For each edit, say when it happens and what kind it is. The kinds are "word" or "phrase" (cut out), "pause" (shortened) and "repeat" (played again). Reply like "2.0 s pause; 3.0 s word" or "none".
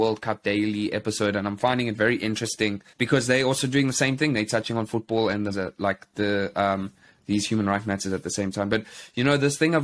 2.9 s pause; 5.5 s word